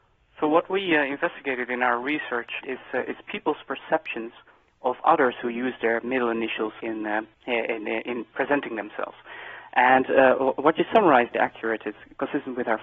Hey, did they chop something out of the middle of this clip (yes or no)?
yes